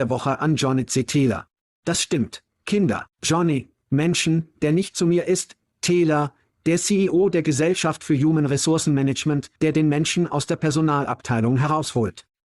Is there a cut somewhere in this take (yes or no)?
yes